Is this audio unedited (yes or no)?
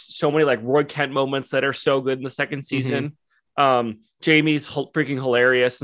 yes